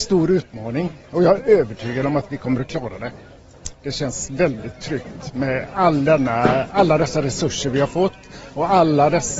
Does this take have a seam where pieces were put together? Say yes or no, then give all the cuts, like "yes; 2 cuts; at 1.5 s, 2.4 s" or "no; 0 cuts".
no; 0 cuts